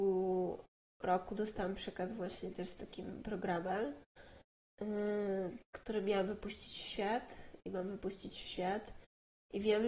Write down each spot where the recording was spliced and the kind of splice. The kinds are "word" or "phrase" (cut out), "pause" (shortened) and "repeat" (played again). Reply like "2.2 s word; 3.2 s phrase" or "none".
5.7 s pause